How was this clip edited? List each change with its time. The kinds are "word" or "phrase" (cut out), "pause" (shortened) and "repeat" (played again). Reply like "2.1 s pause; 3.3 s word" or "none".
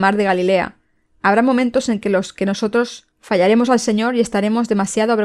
3.1 s pause